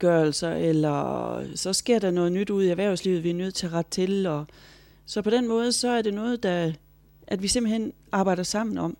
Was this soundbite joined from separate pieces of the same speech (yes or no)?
no